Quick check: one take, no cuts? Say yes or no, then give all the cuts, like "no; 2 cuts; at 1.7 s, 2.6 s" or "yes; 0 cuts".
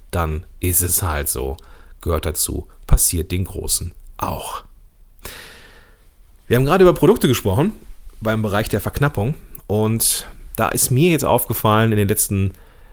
yes; 0 cuts